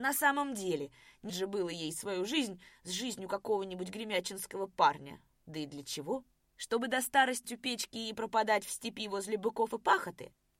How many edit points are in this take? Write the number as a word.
two